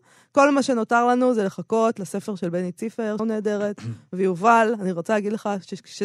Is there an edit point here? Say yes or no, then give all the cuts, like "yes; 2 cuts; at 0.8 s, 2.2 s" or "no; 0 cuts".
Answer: yes; 1 cut; at 3.2 s